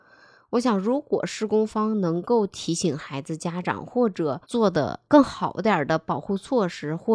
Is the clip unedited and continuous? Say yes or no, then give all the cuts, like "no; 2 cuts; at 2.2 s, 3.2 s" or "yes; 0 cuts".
no; 2 cuts; at 4.4 s, 5.1 s